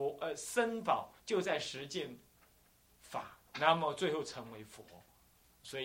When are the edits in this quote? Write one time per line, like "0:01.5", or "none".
0:01.2
0:03.5